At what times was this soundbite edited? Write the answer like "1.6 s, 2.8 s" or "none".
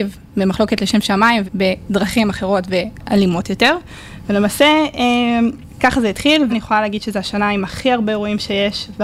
1.4 s, 6.5 s